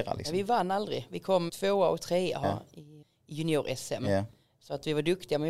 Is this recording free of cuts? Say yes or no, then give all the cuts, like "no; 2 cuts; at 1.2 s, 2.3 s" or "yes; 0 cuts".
no; 3 cuts; at 1.5 s, 2.4 s, 3.0 s